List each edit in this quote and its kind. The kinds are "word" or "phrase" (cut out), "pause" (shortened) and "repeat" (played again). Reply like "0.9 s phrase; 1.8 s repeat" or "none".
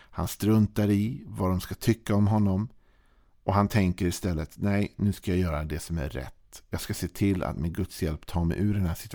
none

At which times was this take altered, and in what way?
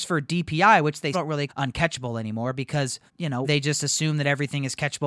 1.1 s word; 1.5 s phrase; 3.1 s pause; 3.4 s word

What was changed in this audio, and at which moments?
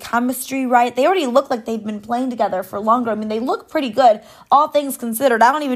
none

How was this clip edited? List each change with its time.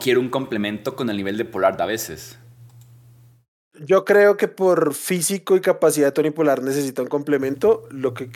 none

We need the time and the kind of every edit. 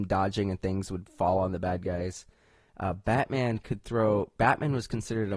none

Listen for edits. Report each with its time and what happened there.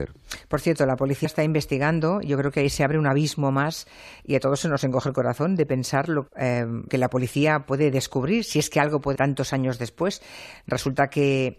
1.2 s word; 6.3 s word; 6.9 s word; 9.2 s word

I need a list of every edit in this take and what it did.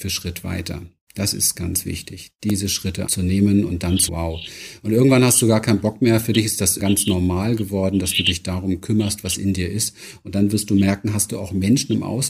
1.5 s word; 3.1 s word; 4.1 s word; 6.8 s word

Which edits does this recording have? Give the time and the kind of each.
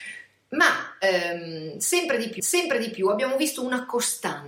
2.4 s repeat

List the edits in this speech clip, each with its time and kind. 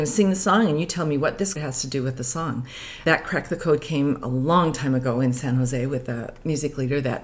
1.6 s word

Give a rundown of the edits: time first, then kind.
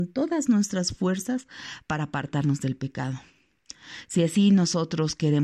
none

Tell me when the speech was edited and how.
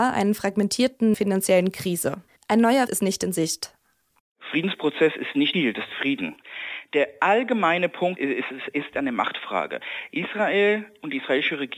1.1 s phrase; 2.4 s pause; 2.9 s word; 5.5 s word; 5.9 s phrase; 8.2 s word

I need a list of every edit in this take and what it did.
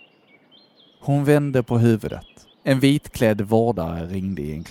2.5 s pause

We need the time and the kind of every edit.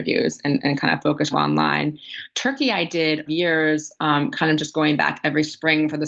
1.3 s phrase; 3.3 s phrase

